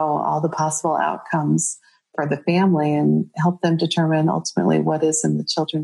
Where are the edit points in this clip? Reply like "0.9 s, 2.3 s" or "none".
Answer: none